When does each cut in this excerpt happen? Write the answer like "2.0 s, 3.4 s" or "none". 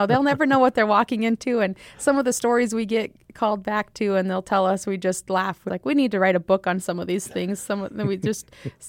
5.7 s